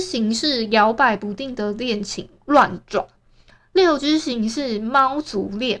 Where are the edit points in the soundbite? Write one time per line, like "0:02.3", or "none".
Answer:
none